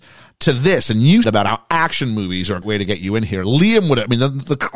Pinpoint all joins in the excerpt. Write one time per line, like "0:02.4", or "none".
0:01.2
0:02.6

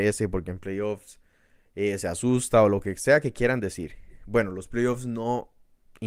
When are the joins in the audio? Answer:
none

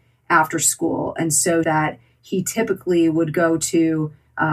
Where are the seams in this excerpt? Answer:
0:01.6

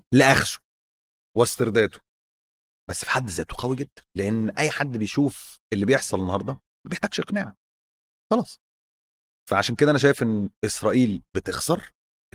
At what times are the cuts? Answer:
0:05.6
0:10.6

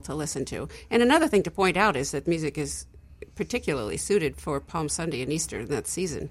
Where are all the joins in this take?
0:02.3

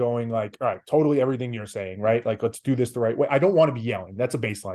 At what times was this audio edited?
none

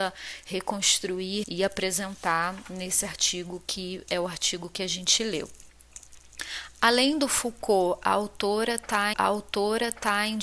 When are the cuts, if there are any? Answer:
0:01.4
0:09.1

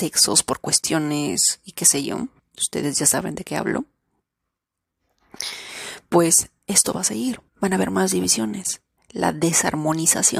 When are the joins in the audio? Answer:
0:02.4
0:07.5
0:09.0

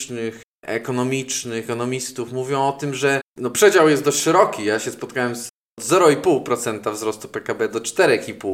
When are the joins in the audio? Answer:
none

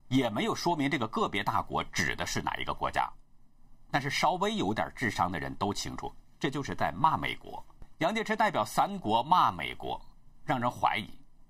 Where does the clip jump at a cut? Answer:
none

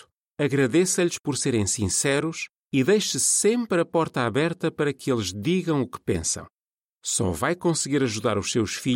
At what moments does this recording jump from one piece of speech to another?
none

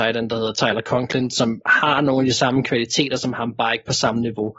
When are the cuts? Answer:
none

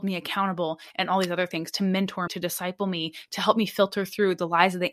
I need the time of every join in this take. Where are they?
0:02.3

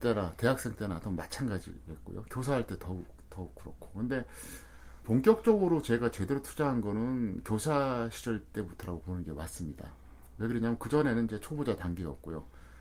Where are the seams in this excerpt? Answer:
0:05.0

